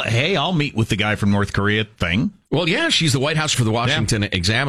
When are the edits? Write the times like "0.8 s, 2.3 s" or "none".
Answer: 3.5 s